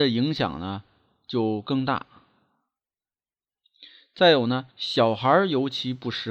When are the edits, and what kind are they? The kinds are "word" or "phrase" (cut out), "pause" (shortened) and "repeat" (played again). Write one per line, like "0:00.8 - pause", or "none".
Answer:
0:04.7 - pause